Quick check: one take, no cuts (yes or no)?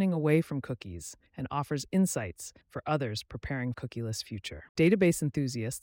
no